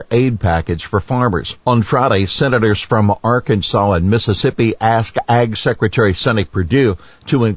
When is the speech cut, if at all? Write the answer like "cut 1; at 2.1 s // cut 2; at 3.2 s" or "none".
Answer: cut 1; at 1.6 s